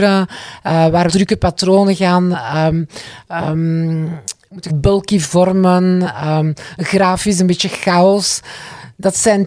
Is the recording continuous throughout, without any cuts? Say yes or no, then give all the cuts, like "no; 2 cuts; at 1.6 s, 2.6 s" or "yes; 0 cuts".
no; 2 cuts; at 1.1 s, 4.7 s